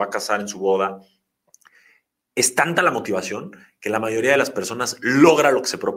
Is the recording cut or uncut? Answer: uncut